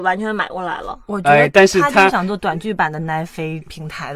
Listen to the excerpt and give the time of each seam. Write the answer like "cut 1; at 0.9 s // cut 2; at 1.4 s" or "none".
none